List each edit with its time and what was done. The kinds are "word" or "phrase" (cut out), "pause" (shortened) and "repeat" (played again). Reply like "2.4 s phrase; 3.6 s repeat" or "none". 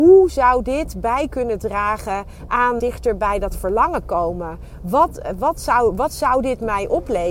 2.8 s word